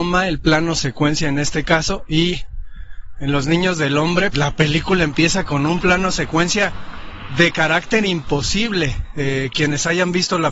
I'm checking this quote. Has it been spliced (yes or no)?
yes